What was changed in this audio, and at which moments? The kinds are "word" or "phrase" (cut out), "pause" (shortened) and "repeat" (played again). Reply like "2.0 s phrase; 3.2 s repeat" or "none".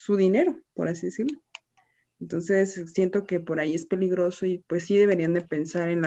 none